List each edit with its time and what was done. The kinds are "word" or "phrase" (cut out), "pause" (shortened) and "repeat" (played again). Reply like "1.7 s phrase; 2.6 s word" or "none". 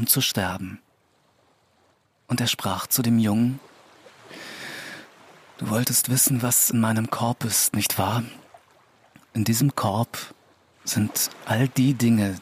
none